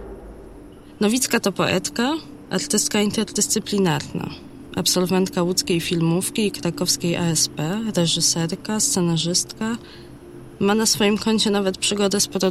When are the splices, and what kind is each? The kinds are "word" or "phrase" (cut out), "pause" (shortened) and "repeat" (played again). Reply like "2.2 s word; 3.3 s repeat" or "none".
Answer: none